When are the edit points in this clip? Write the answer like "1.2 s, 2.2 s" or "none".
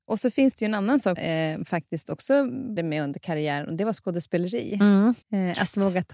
1.2 s, 2.8 s, 5.2 s